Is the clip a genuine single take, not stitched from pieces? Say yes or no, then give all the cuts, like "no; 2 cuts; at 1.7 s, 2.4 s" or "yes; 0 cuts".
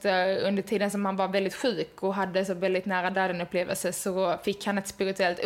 yes; 0 cuts